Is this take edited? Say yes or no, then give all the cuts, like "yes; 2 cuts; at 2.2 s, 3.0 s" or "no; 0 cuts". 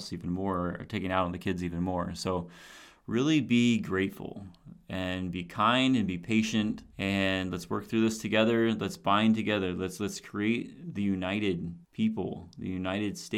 yes; 2 cuts; at 6.9 s, 11.8 s